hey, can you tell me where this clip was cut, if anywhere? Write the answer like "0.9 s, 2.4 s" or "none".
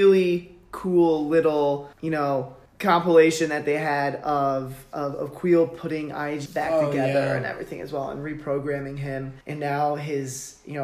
1.9 s, 2.7 s, 6.5 s, 9.4 s